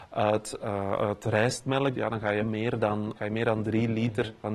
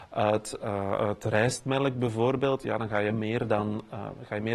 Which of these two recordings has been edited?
first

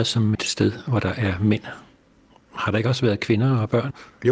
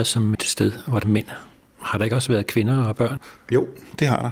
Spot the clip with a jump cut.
second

